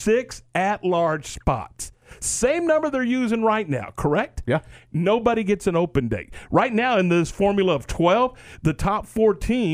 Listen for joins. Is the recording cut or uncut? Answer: uncut